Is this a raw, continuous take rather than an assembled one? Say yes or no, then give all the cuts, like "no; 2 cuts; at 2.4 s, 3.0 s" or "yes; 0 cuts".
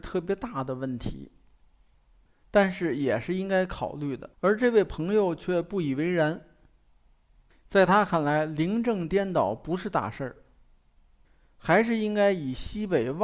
no; 1 cut; at 4.3 s